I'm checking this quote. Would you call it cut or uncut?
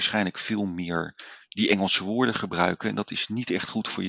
uncut